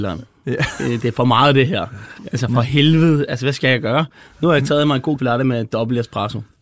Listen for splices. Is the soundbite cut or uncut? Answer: cut